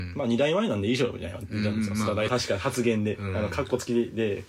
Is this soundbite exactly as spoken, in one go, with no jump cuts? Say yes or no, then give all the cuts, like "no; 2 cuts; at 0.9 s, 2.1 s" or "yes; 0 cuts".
no; 1 cut; at 2.3 s